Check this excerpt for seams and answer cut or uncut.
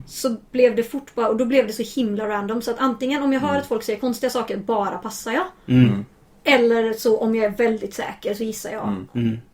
uncut